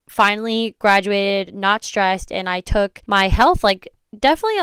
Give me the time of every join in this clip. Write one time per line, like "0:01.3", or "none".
0:03.0

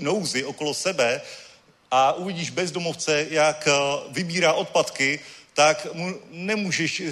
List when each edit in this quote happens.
none

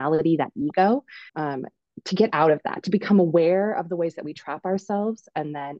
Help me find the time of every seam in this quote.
0:01.3

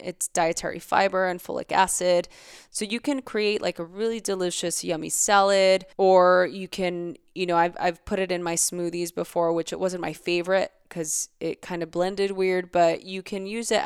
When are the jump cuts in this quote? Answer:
0:05.9

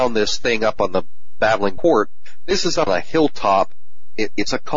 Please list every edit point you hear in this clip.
0:01.8
0:02.9

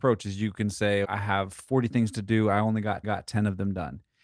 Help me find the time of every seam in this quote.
0:01.0
0:03.0

